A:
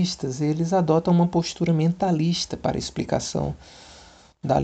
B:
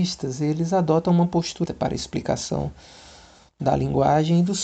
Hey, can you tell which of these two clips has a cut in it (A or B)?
B